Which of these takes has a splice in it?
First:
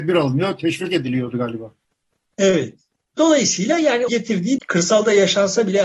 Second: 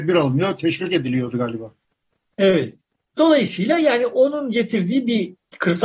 first; 2 cuts; at 4.1 s, 4.6 s

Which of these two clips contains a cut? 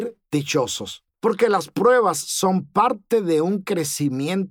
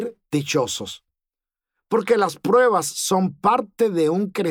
first; 1 cut; at 1.1 s

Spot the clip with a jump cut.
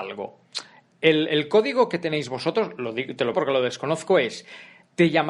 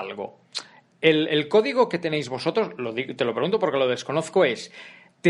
first; 1 cut; at 3.3 s

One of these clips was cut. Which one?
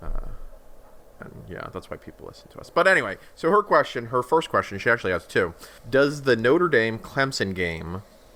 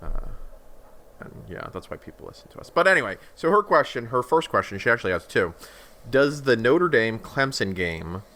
first; 1 cut; at 5.8 s

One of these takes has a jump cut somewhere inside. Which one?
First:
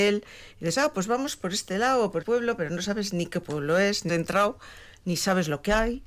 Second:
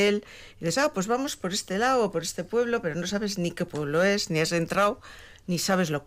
first; 2 cuts; at 2.2 s, 4.1 s

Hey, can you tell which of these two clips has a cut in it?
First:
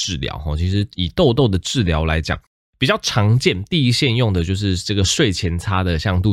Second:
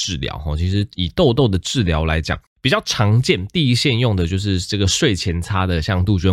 second; 1 cut; at 2.5 s

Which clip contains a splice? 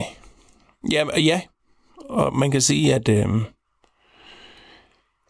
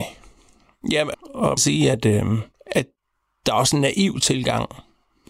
second; 3 cuts; at 1.1 s, 1.6 s, 2.5 s

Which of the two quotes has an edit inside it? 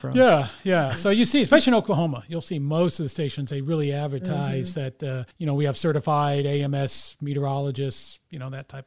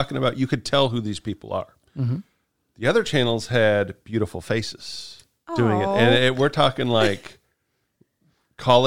first; 1 cut; at 5.3 s

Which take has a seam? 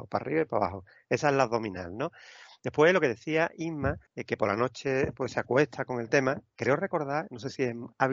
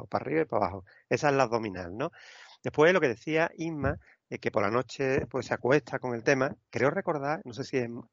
first; 1 cut; at 4.1 s

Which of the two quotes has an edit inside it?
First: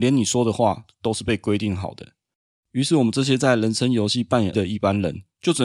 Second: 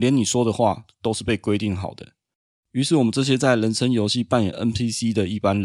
first; 1 cut; at 4.5 s

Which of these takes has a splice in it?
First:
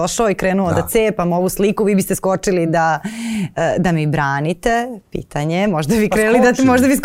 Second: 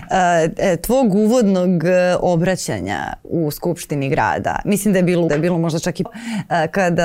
second; 2 cuts; at 5.3 s, 6.1 s

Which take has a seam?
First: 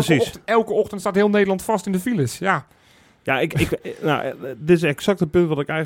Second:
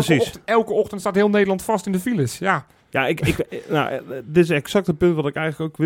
second; 1 cut; at 2.8 s

